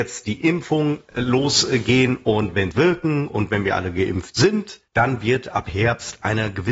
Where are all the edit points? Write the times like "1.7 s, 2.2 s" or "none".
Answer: 2.7 s, 4.9 s

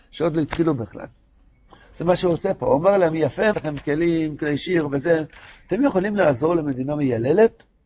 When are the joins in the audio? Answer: 3.5 s

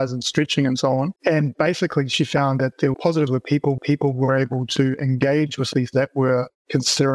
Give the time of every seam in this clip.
1.2 s, 2.9 s, 3.3 s, 3.8 s, 5.9 s

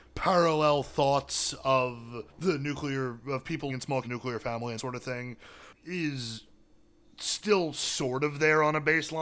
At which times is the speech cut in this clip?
2.3 s, 3.7 s, 4.0 s, 4.8 s, 5.7 s

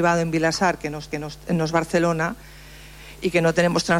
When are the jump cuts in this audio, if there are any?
1.1 s

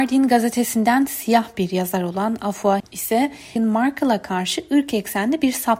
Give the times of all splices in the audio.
2.8 s, 3.6 s

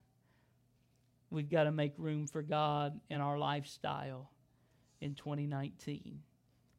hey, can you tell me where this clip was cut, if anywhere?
none

